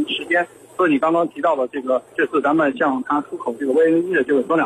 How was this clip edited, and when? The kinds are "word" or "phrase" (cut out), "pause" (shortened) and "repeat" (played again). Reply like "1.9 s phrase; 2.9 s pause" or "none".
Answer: 2.1 s pause

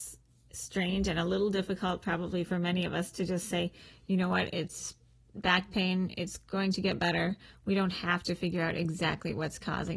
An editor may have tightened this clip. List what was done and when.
none

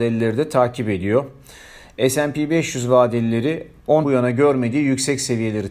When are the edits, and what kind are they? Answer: 4.0 s word

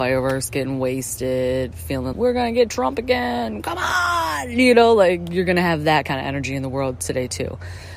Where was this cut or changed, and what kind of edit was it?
2.1 s word

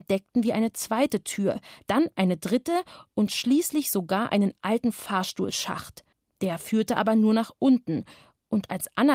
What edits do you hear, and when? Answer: 6.1 s pause

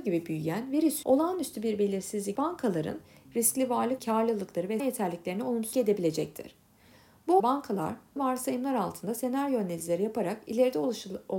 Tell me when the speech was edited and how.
1.0 s word; 2.3 s word; 3.3 s word; 4.0 s word; 4.8 s word; 5.7 s word; 7.4 s word; 8.2 s word

